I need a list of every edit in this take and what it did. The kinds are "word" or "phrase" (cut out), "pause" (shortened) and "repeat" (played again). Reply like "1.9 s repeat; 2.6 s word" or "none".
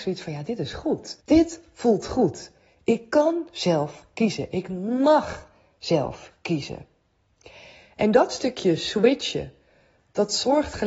1.2 s pause